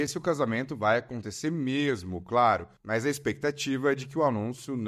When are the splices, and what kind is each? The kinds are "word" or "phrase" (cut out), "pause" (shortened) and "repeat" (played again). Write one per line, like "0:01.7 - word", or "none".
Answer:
0:02.8 - pause